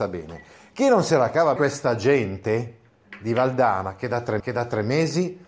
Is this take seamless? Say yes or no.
no